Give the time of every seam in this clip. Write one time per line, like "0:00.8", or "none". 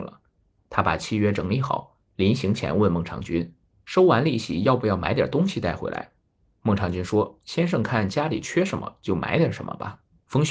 none